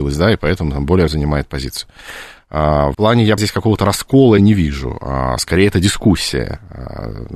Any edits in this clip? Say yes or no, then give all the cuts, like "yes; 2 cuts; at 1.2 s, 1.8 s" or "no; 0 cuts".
yes; 4 cuts; at 1.1 s, 2.9 s, 3.4 s, 4.4 s